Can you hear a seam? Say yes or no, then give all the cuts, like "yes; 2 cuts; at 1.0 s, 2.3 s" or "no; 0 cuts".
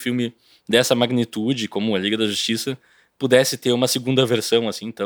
no; 0 cuts